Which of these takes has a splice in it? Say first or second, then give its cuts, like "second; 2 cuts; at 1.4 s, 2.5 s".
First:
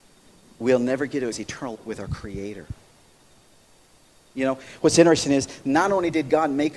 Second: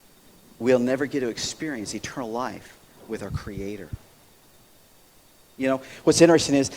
first; 2 cuts; at 1.3 s, 1.7 s